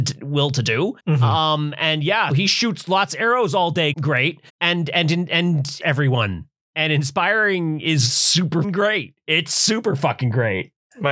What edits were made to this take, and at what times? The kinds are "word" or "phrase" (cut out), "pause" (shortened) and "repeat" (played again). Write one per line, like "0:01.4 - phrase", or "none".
0:01.0 - pause
0:02.3 - word
0:03.9 - word
0:04.5 - pause
0:05.8 - word
0:08.6 - word